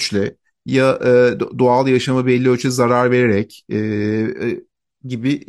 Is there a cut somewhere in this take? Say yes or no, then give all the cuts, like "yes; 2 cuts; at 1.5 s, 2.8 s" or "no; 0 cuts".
no; 0 cuts